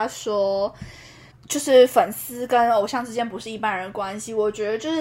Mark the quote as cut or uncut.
cut